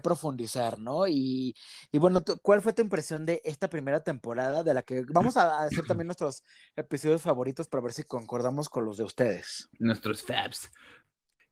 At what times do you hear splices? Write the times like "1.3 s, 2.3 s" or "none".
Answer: none